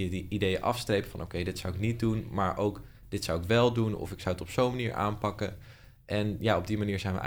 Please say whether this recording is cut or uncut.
uncut